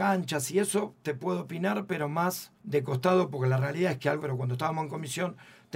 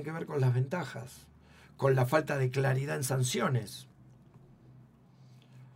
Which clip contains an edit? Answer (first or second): first